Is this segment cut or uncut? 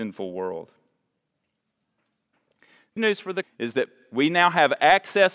cut